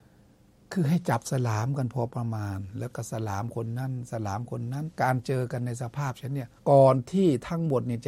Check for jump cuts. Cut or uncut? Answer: cut